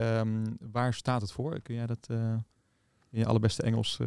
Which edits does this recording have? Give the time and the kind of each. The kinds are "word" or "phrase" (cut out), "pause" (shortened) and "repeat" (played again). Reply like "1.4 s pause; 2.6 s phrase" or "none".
none

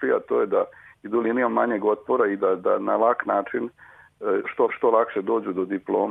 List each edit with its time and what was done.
4.7 s repeat

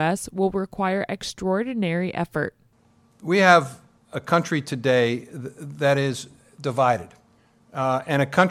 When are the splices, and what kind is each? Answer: none

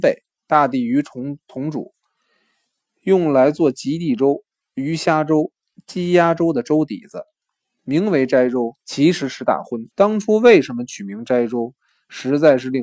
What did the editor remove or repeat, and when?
8.8 s pause; 9.9 s pause

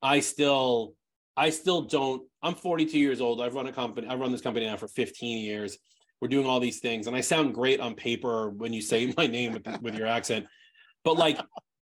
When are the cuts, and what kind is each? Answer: none

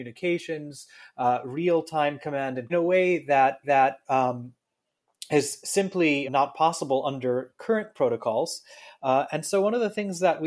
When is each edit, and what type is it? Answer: 2.7 s phrase; 3.6 s repeat; 6.2 s word

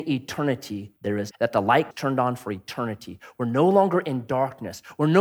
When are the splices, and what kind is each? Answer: 1.0 s pause; 1.3 s phrase; 1.9 s word

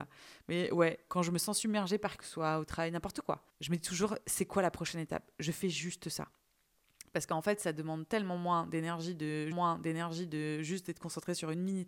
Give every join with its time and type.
1.1 s word; 2.2 s phrase; 3.5 s pause; 9.5 s repeat

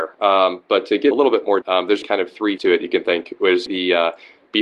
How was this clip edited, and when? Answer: 1.1 s word; 1.6 s word; 2.0 s word; 2.6 s word; 3.7 s word

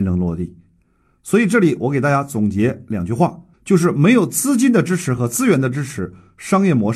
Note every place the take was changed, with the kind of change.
3.5 s pause

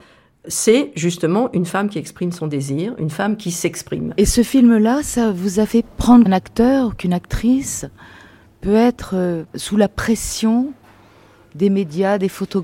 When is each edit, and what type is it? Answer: 6.3 s phrase

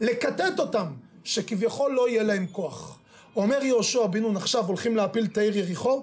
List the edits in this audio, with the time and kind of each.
none

